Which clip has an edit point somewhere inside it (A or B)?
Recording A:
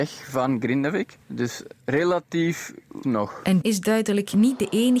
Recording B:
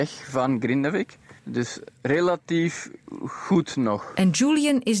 A